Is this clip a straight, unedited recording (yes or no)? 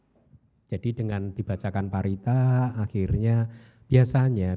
yes